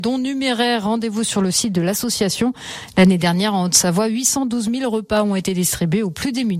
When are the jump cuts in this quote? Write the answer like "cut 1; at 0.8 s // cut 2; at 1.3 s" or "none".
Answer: none